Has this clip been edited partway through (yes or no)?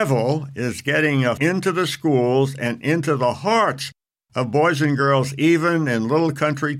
yes